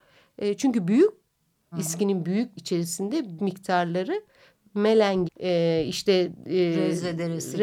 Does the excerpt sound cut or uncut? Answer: cut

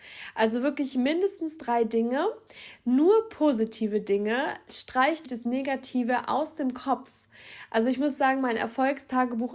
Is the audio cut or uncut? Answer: cut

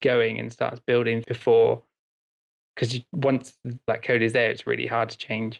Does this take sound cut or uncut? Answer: cut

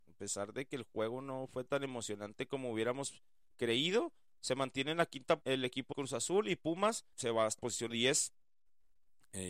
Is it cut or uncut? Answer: cut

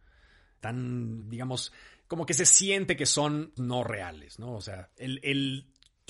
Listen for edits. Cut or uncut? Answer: cut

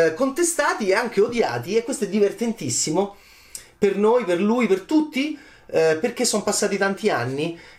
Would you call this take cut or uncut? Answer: uncut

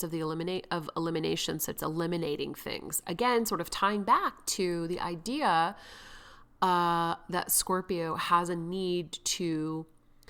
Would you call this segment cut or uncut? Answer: cut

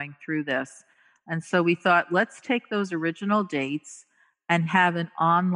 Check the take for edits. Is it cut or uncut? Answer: uncut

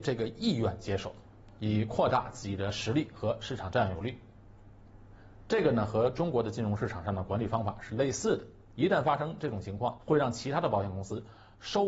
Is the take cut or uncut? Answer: cut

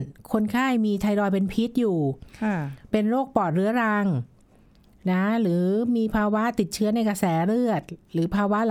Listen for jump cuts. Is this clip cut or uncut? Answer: uncut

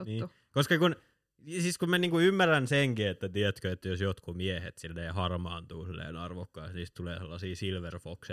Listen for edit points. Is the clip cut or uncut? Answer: uncut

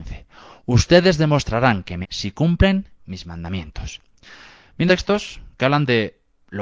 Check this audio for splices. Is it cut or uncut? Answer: cut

